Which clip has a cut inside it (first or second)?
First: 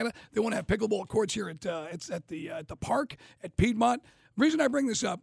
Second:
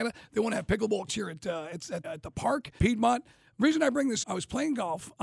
second